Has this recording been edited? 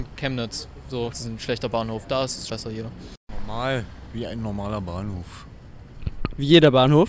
yes; 2 cuts; at 1.1 s, 2.5 s

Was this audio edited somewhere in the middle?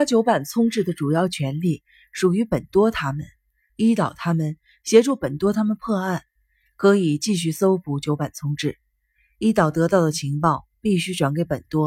no; 0 cuts

